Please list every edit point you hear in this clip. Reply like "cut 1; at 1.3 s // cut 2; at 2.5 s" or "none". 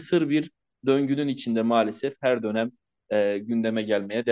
none